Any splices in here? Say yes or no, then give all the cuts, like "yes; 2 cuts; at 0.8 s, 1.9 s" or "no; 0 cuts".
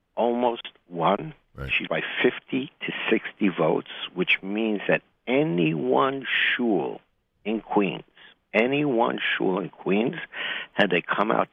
yes; 1 cut; at 1.9 s